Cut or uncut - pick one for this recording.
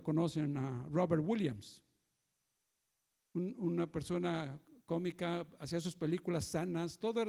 uncut